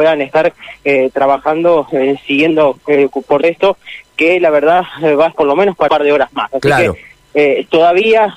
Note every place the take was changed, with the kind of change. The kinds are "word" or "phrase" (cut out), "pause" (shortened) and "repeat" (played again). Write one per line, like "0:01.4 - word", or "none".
0:03.4 - word
0:05.3 - word
0:05.9 - word